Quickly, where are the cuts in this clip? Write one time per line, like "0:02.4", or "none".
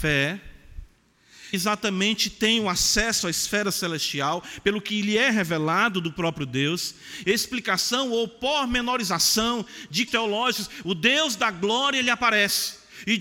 0:01.5
0:07.2
0:10.1